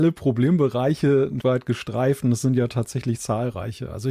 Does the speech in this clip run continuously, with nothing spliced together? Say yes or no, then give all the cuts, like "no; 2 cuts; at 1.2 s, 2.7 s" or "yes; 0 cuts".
no; 1 cut; at 1.4 s